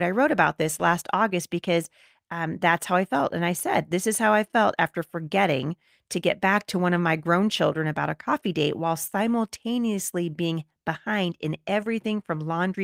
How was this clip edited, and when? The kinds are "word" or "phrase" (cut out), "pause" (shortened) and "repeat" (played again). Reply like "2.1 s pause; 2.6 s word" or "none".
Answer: none

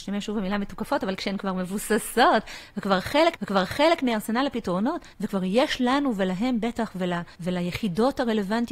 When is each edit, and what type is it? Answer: 3.4 s repeat; 5.1 s pause; 7.3 s pause

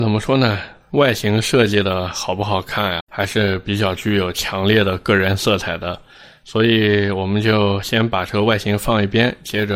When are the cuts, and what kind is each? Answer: 3.0 s word

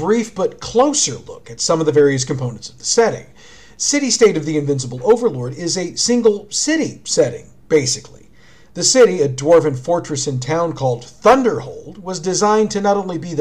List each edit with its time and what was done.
none

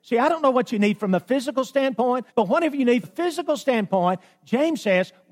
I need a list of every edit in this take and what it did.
2.3 s pause; 3.0 s word

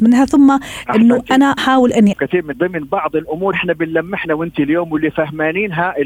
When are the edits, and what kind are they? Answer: 1.6 s word; 2.1 s word; 2.5 s word; 3.5 s word; 4.2 s word

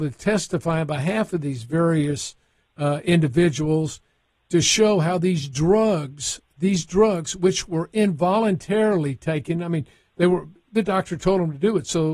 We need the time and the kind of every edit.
none

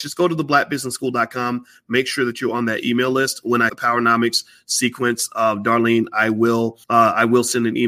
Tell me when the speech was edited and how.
3.7 s word; 6.8 s pause

